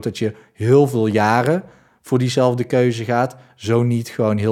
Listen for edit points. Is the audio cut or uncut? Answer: uncut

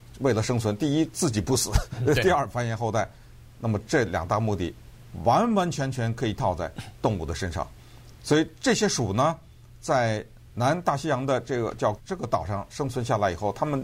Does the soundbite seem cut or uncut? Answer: cut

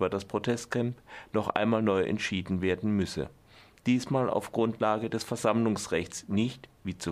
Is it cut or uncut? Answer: uncut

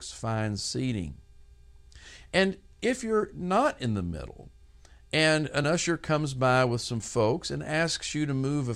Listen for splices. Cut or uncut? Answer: uncut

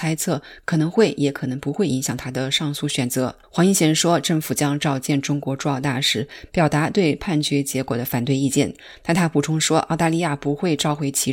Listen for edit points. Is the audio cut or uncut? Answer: cut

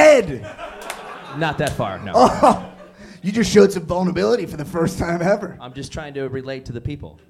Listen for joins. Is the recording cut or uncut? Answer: uncut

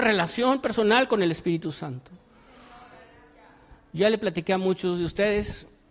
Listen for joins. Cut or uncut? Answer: uncut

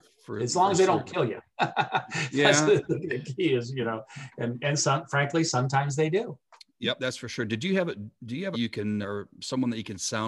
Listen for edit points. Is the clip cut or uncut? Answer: cut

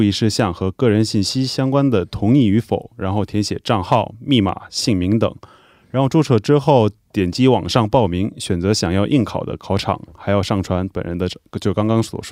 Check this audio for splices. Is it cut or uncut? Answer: uncut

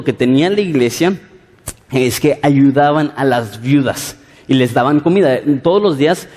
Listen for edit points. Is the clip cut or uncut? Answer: uncut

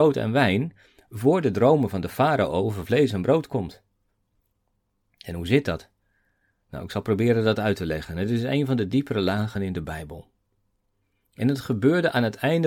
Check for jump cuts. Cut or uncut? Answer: uncut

